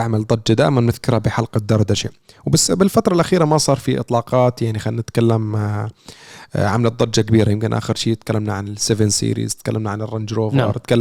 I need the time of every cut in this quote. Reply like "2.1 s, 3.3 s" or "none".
none